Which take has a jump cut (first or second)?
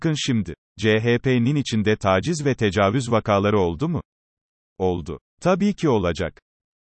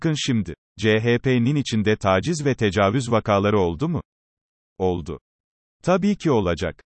first